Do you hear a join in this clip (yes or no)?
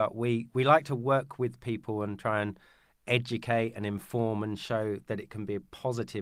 no